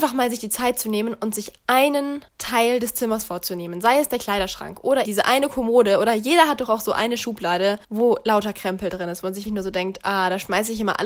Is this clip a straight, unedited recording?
no; 4 cuts; at 2.3 s, 5.0 s, 7.8 s, 9.5 s

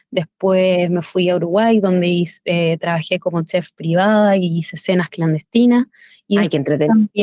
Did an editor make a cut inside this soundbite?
no; 0 cuts

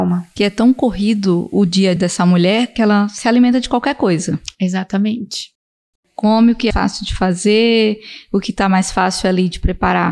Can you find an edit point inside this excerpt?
yes; 2 cuts; at 2.0 s, 6.7 s

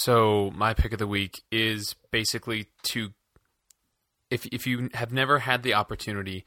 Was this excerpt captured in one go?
yes; 0 cuts

